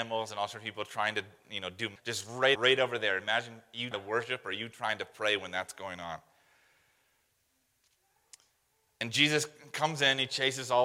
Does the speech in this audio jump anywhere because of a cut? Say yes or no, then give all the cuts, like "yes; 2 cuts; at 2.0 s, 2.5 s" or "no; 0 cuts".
yes; 3 cuts; at 2.0 s, 2.6 s, 3.9 s